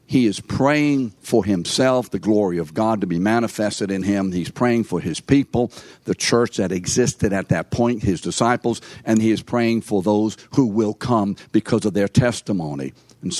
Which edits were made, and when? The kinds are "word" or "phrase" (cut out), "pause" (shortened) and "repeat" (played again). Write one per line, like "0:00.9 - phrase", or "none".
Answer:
0:01.2 - pause
0:09.2 - word